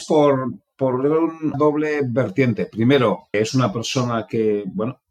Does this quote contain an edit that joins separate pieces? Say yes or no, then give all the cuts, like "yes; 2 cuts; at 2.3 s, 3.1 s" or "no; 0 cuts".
yes; 2 cuts; at 1.5 s, 3.3 s